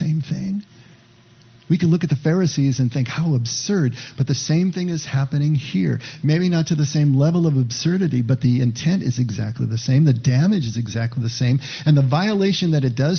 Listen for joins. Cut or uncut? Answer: uncut